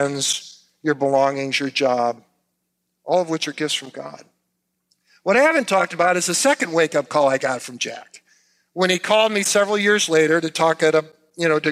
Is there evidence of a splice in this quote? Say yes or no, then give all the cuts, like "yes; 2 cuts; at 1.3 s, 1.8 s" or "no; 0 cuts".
no; 0 cuts